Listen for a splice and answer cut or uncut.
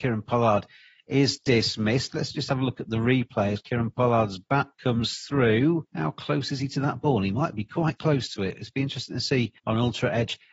uncut